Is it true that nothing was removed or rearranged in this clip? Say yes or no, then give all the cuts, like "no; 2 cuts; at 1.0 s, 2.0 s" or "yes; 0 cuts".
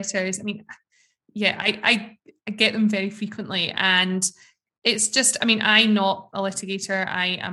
yes; 0 cuts